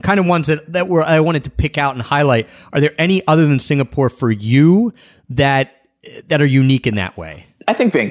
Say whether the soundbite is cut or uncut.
uncut